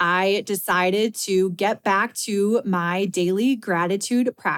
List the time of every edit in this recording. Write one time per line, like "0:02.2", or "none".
none